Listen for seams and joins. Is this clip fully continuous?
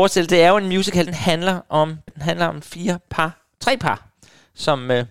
no; 2 cuts; at 1.1 s, 2.1 s

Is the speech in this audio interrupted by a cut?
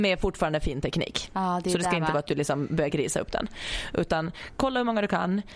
no; 0 cuts

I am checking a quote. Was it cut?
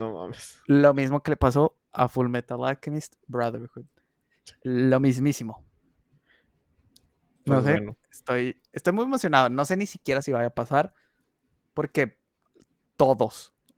no; 0 cuts

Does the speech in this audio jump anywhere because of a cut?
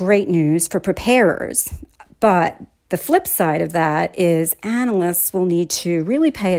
no; 0 cuts

